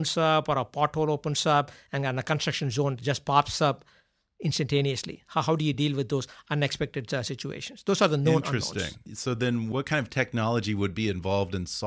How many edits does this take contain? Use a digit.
0